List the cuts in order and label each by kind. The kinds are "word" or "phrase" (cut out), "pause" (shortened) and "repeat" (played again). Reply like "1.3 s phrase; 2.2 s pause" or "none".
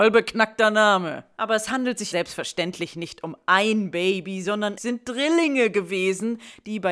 2.1 s word; 4.8 s word